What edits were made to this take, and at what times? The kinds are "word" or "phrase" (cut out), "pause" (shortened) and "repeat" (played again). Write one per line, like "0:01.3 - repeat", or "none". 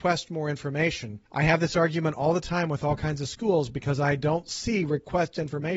0:01.3 - pause